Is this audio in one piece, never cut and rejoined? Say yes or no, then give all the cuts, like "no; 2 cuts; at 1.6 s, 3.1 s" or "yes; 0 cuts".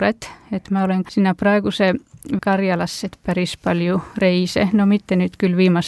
no; 3 cuts; at 1.0 s, 2.4 s, 3.1 s